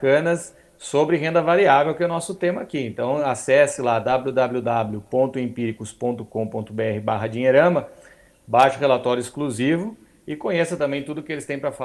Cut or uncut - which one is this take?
uncut